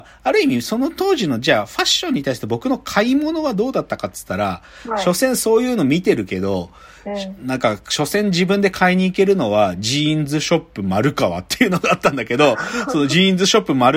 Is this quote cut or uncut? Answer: uncut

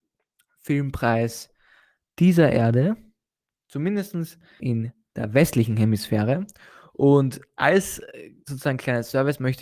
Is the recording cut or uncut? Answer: cut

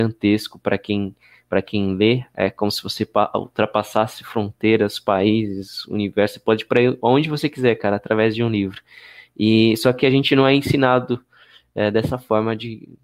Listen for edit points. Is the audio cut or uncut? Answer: uncut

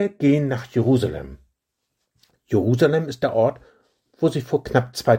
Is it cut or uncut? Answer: uncut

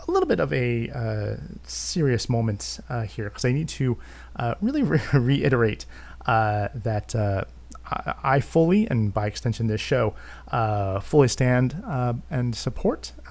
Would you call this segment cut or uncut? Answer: uncut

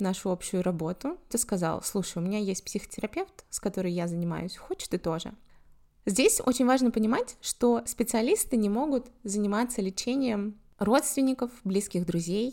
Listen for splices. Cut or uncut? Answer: cut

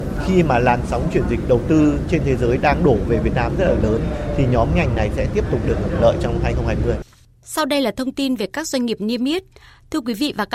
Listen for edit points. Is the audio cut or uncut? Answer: uncut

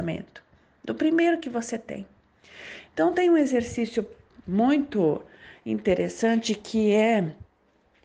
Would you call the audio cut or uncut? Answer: uncut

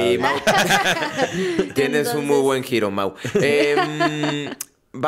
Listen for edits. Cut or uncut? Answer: uncut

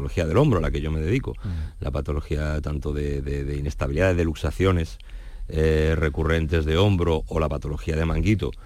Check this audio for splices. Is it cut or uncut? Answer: uncut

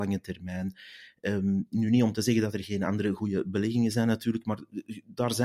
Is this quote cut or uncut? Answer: uncut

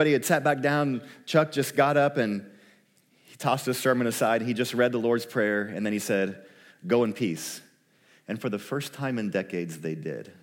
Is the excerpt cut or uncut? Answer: uncut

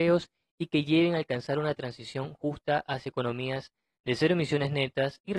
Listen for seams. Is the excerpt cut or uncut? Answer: uncut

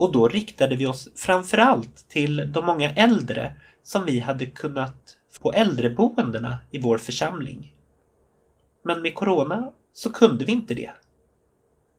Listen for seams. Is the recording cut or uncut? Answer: cut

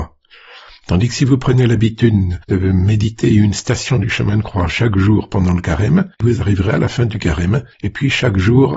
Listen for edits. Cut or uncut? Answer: cut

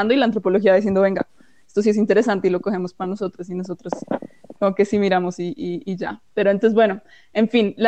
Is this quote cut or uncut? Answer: uncut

